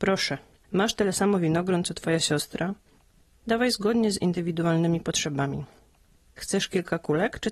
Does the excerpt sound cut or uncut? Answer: uncut